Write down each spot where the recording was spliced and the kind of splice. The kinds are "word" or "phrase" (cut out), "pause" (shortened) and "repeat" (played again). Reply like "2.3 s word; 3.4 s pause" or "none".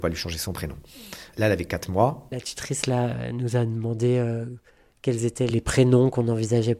4.7 s pause